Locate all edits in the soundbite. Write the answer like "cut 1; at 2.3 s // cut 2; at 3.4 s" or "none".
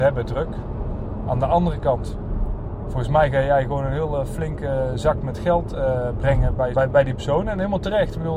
cut 1; at 6.7 s